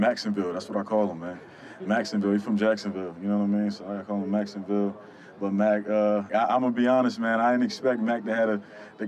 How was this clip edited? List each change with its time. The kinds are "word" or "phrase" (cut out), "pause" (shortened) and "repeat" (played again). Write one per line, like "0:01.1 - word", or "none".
0:06.3 - word